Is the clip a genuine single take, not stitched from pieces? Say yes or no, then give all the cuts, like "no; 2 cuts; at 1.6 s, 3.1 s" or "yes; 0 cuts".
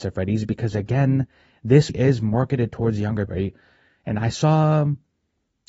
no; 2 cuts; at 1.9 s, 3.3 s